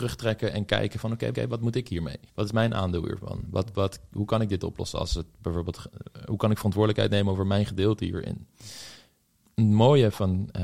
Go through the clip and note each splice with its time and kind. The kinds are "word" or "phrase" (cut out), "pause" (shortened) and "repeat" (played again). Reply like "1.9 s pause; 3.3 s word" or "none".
1.3 s repeat; 2.3 s pause